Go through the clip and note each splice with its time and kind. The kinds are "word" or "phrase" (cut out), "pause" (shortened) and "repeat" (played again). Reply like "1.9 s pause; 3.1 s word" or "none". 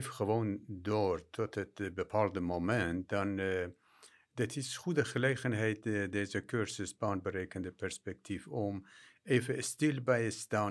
none